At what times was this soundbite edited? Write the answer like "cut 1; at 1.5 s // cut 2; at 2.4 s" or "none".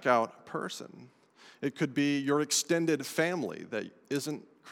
none